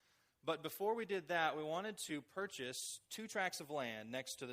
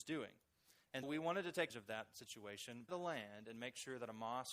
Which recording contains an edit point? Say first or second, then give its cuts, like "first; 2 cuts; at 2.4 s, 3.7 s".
second; 3 cuts; at 1.0 s, 1.7 s, 2.9 s